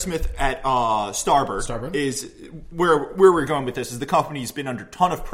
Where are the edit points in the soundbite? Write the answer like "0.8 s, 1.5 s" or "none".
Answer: none